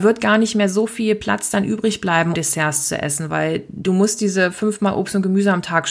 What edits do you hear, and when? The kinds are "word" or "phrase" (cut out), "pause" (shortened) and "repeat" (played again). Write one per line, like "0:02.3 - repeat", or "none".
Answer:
0:02.3 - word